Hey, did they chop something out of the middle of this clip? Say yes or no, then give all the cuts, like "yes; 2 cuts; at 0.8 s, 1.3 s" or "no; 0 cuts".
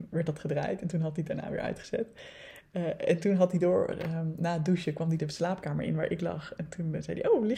no; 0 cuts